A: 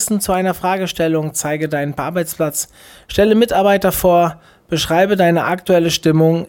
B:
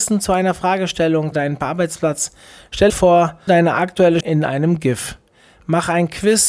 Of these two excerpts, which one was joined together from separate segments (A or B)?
B